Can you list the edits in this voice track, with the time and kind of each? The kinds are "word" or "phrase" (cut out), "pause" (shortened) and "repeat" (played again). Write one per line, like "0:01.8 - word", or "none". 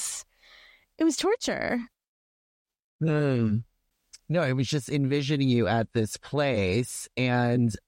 none